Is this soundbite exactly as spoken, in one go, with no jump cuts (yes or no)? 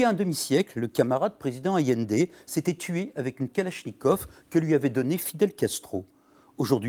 yes